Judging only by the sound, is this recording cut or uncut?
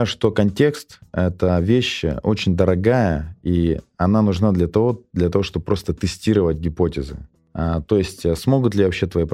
uncut